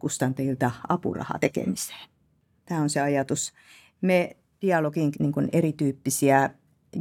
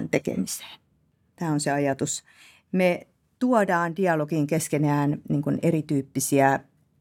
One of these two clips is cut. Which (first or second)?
first